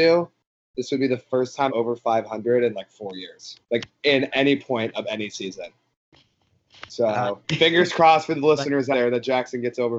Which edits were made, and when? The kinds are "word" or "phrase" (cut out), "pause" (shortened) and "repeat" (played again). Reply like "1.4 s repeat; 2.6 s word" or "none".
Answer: 1.7 s word; 3.6 s pause; 4.3 s word; 7.4 s word; 8.9 s word